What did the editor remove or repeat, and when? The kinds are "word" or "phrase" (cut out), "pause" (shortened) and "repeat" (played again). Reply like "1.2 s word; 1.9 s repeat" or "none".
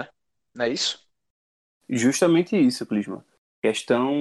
none